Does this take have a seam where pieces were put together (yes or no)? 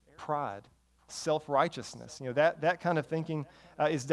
no